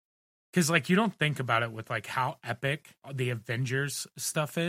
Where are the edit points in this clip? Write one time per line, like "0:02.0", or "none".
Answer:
0:03.0

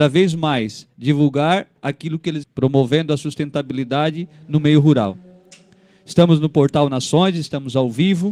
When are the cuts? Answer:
0:01.8
0:02.4

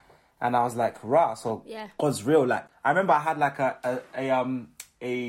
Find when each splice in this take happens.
none

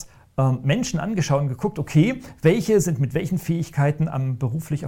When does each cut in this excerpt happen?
none

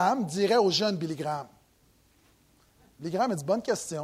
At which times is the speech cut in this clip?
none

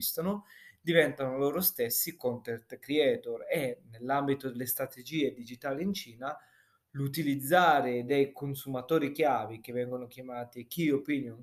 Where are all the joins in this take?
none

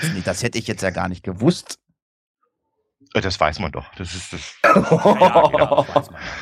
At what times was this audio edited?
none

